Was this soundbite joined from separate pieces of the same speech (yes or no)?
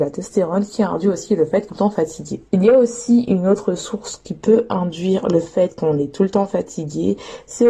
yes